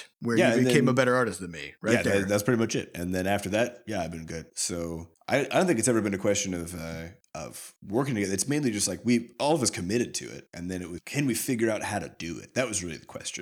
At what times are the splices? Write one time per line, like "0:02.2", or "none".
0:11.0